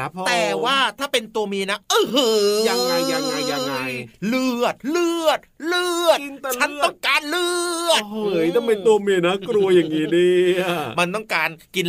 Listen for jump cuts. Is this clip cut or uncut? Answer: cut